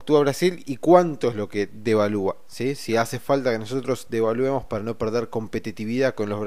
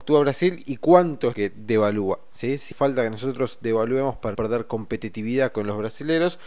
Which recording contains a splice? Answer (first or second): second